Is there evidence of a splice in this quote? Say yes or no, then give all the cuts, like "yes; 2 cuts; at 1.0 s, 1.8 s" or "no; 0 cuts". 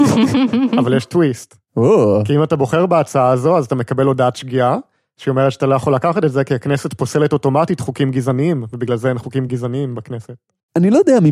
no; 0 cuts